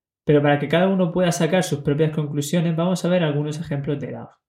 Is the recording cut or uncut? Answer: uncut